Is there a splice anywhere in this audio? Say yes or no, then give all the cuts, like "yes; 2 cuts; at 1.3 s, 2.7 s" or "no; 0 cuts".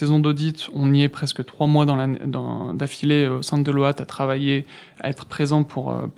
no; 0 cuts